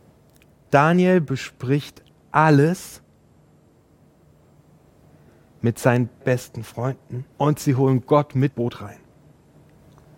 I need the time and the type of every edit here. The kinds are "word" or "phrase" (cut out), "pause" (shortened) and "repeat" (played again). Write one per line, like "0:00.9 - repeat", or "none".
0:02.1 - pause
0:06.2 - word
0:07.3 - pause
0:08.5 - word